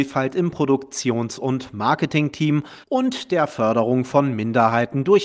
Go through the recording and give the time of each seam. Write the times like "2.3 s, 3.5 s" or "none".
2.8 s

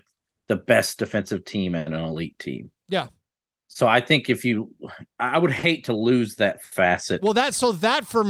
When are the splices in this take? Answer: 2.8 s, 5.1 s

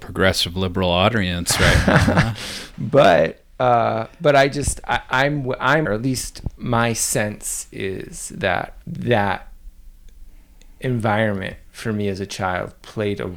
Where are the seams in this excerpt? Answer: 5.8 s

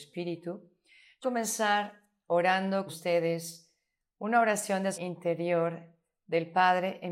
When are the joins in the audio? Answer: 1.2 s, 2.9 s, 4.9 s

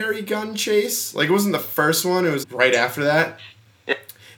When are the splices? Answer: 2.4 s

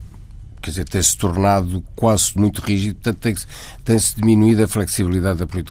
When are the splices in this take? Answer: 2.4 s

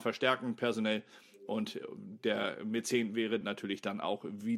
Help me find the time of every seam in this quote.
3.4 s

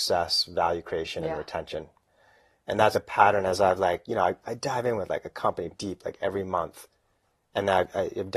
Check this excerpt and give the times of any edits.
2.9 s, 5.7 s

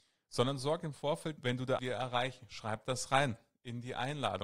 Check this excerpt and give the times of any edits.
1.4 s, 1.8 s

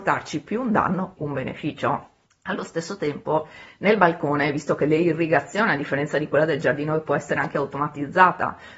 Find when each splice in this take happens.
1.2 s

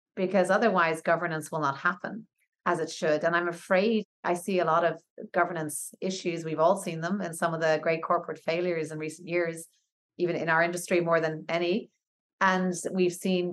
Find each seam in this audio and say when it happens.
none

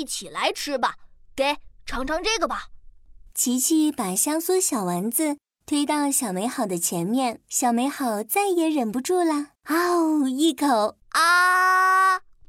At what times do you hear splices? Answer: 7.4 s, 9.5 s, 11.0 s

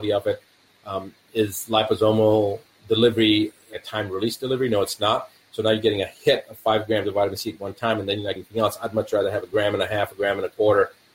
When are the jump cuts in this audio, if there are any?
3.7 s, 8.4 s

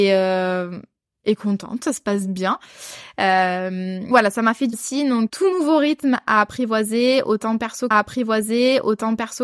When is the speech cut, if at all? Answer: 4.1 s, 4.7 s, 5.3 s, 7.9 s

